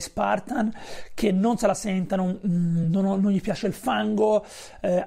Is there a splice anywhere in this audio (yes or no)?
no